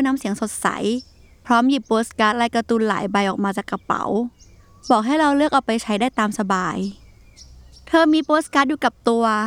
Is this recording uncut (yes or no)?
yes